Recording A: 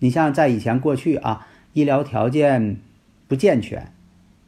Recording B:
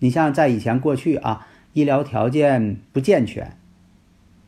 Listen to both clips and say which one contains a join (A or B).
B